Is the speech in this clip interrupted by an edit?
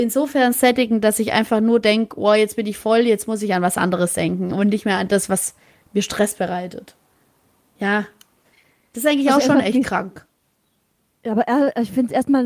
no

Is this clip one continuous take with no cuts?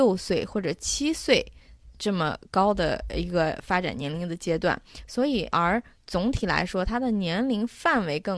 no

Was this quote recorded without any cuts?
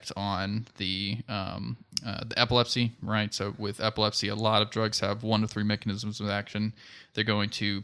yes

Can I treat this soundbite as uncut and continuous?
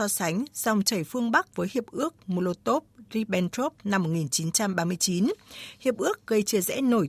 no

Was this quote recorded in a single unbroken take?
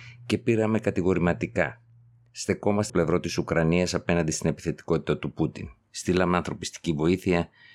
no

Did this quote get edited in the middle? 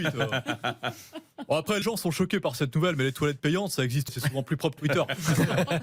yes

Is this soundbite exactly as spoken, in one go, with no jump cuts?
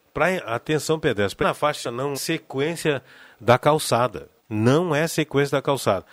no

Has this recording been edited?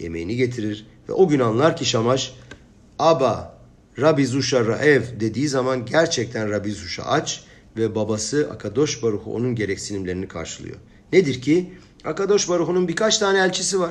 no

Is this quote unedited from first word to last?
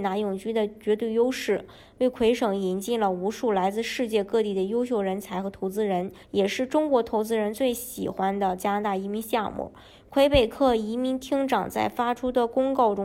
no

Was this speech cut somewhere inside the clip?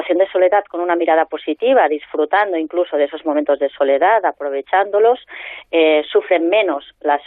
no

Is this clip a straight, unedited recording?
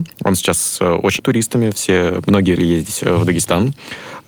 no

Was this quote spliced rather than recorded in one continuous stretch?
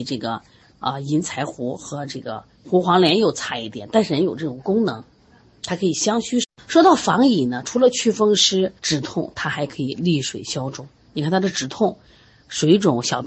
yes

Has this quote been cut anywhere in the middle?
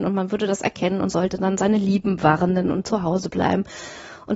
no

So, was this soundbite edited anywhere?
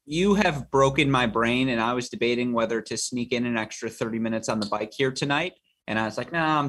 no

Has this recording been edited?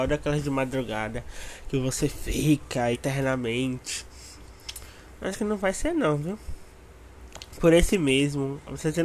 yes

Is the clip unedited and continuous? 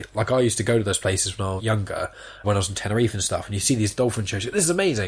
no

